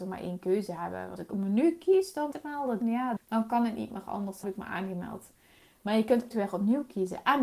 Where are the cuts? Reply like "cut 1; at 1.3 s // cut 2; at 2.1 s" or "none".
cut 1; at 1.2 s // cut 2; at 2.3 s // cut 3; at 2.8 s // cut 4; at 3.2 s // cut 5; at 4.4 s // cut 6; at 6.3 s